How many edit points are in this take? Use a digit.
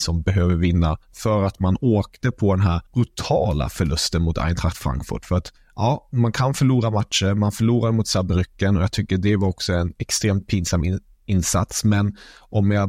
3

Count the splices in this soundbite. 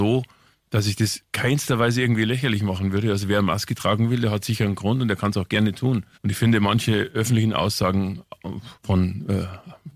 3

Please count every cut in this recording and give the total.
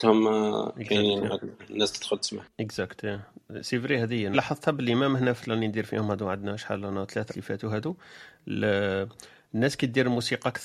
4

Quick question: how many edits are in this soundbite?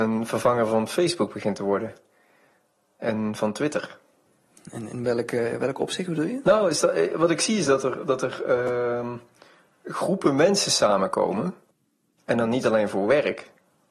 0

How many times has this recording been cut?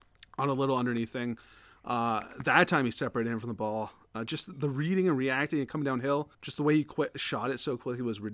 1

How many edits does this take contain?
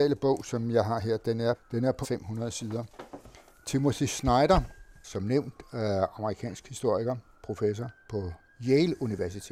2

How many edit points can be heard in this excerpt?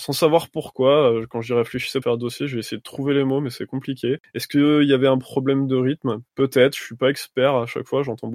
2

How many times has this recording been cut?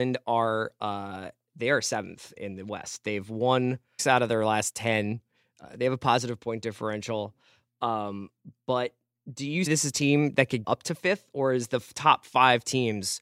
4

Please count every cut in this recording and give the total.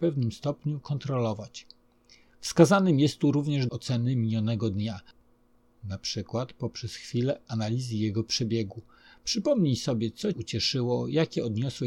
2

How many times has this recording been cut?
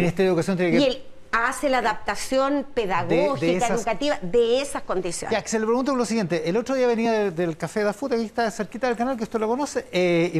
0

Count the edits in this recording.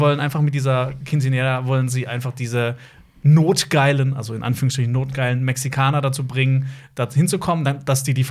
0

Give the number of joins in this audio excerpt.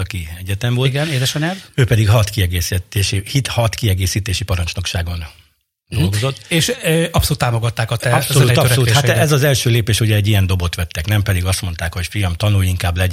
0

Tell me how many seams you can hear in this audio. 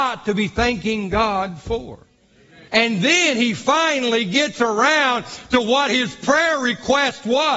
1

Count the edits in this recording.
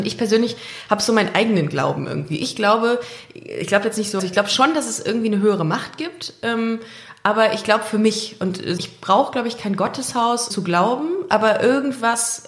3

